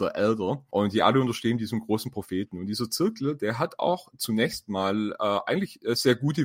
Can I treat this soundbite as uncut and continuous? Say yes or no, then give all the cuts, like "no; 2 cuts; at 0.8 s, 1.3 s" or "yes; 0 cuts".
yes; 0 cuts